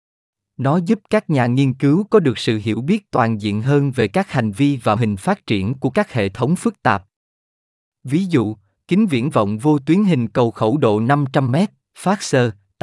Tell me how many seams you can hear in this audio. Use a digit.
1